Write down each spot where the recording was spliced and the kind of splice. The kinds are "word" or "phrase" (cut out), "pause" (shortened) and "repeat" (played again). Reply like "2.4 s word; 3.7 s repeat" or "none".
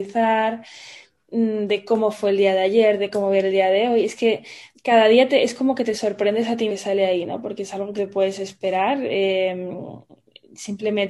4.7 s pause; 6.7 s phrase; 8.0 s word